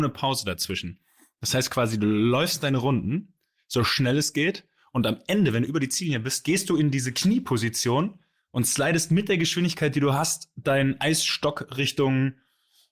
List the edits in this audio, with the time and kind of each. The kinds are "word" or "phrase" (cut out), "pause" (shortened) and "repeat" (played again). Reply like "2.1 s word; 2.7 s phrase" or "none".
none